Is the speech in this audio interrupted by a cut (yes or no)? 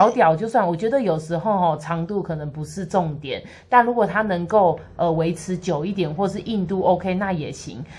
no